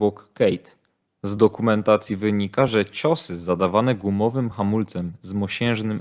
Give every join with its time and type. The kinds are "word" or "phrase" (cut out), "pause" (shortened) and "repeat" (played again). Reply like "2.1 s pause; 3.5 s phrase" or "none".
none